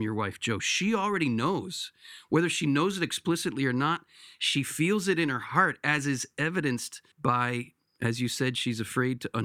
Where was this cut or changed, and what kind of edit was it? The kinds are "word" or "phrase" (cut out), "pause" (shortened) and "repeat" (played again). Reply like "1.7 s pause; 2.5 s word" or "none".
7.1 s pause